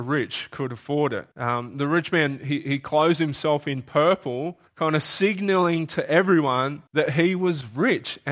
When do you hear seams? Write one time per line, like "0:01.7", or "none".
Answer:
0:01.3
0:04.7
0:06.9